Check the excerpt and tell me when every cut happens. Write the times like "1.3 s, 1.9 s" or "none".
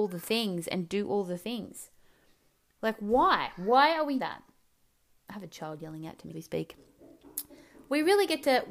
4.2 s, 6.3 s